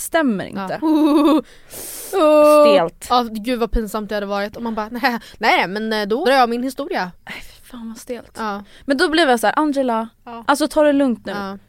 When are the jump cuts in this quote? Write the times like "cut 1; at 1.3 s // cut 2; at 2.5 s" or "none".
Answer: cut 1; at 6.2 s // cut 2; at 10.2 s